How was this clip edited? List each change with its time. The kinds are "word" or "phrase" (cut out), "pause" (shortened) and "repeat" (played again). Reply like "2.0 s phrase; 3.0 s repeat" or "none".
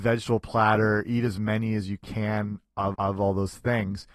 2.9 s repeat